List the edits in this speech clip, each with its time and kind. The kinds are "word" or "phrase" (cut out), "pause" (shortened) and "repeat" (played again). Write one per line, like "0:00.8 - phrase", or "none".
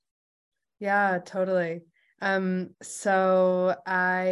0:02.7 - pause